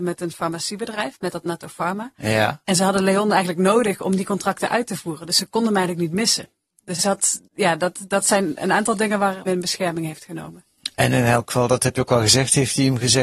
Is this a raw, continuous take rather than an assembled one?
no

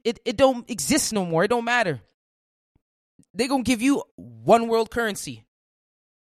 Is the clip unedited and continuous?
yes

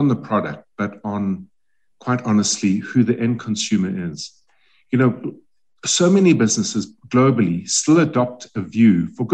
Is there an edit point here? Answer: no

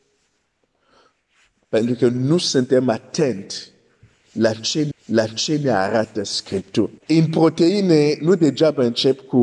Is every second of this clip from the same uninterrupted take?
no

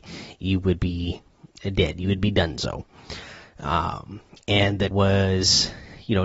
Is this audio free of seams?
no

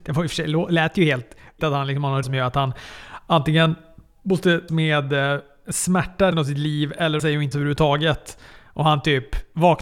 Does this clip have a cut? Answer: yes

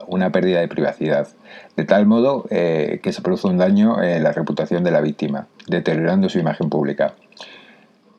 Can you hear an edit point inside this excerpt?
no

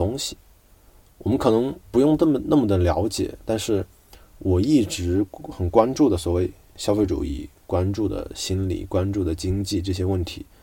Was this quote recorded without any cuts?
no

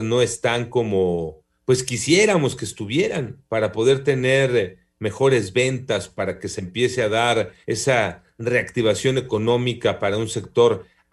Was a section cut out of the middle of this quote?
yes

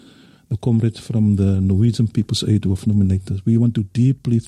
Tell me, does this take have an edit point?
no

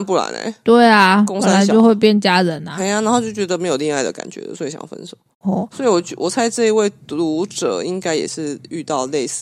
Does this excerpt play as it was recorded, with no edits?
no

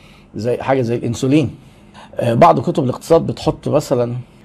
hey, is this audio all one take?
yes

